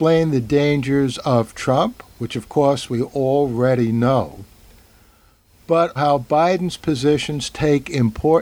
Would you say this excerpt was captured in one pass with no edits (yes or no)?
no